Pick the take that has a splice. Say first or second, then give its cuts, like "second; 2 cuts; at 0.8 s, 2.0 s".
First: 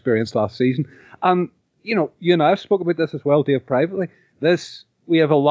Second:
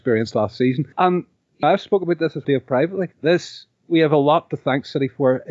second; 4 cuts; at 0.9 s, 1.6 s, 2.4 s, 3.1 s